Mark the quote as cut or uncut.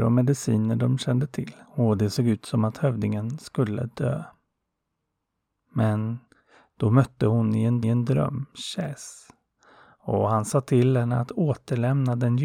cut